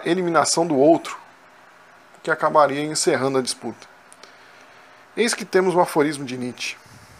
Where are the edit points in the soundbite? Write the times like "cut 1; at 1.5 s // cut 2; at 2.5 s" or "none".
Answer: none